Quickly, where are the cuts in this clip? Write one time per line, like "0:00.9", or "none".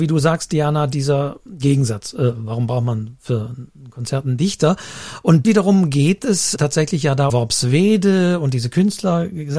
0:05.4
0:06.6
0:07.3